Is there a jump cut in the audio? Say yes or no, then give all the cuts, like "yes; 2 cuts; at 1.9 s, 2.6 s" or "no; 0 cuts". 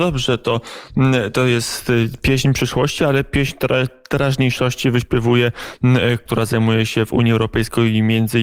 yes; 1 cut; at 6.3 s